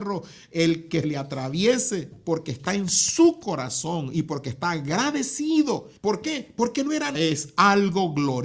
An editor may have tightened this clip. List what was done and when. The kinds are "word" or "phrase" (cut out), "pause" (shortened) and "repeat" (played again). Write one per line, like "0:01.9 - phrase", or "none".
0:01.0 - word
0:06.0 - pause
0:07.1 - phrase